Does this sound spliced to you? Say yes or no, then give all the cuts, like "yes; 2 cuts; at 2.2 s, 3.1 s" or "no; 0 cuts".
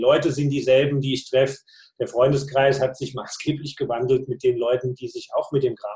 no; 0 cuts